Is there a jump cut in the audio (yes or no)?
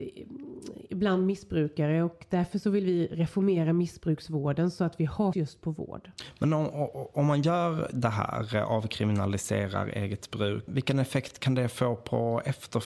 yes